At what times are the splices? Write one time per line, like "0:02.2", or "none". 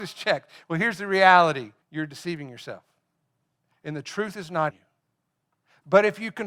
0:01.8
0:04.7